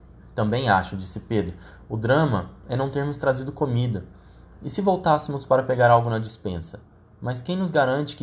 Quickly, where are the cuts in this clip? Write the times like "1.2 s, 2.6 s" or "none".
none